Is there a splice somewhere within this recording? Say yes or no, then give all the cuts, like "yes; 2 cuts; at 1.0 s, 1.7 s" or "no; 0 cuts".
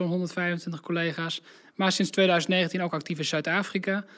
no; 0 cuts